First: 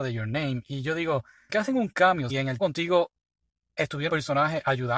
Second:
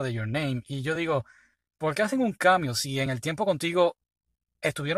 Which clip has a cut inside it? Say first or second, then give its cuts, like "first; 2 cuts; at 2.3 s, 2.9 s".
first; 4 cuts; at 1.5 s, 2.3 s, 2.6 s, 4.1 s